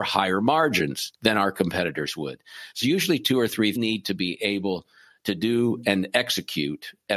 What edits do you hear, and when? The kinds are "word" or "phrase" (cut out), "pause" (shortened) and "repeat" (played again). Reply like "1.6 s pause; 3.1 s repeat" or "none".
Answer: 1.2 s pause; 2.8 s word; 3.8 s phrase